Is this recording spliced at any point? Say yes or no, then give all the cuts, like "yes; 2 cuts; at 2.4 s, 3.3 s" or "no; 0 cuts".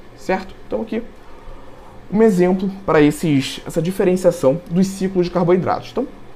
no; 0 cuts